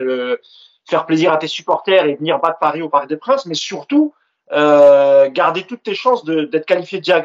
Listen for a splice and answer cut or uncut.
uncut